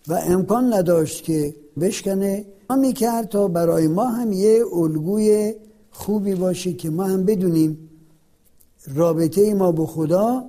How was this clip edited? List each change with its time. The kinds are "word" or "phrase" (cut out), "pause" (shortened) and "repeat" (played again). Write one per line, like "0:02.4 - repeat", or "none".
0:01.8 - phrase
0:02.7 - word